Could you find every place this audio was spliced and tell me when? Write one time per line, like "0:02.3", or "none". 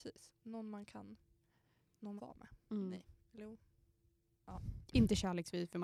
0:02.2